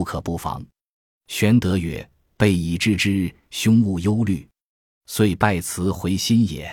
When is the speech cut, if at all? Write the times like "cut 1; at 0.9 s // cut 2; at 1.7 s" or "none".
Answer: none